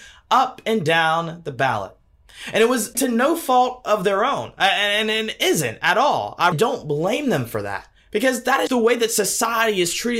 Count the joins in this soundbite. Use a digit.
3